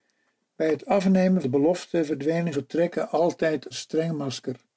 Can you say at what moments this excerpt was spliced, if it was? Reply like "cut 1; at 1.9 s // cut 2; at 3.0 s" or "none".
cut 1; at 1.4 s // cut 2; at 2.5 s // cut 3; at 3.7 s